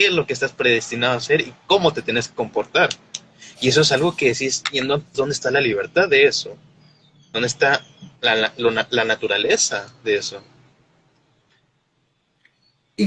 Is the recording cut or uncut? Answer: cut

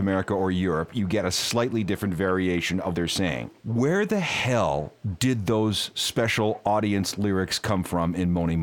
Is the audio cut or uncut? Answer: cut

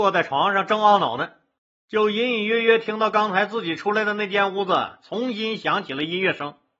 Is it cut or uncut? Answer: uncut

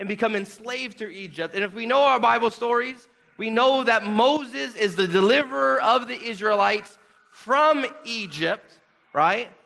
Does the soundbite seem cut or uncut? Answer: uncut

